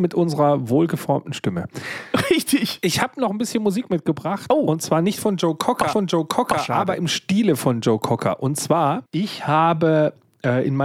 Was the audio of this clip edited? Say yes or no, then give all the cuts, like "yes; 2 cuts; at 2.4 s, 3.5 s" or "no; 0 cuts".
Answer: yes; 2 cuts; at 5.9 s, 9.1 s